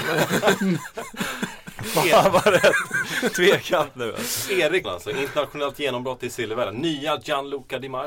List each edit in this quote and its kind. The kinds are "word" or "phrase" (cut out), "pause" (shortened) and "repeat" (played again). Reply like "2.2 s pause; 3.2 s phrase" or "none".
4.8 s word